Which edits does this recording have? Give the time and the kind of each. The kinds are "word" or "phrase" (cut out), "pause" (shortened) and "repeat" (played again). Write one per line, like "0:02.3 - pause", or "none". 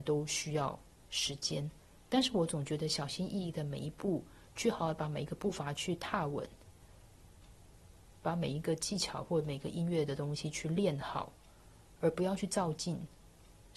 0:02.0 - pause